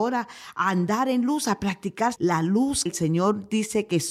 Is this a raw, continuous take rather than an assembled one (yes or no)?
no